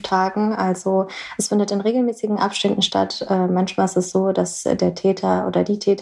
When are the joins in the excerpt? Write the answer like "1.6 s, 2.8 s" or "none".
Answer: none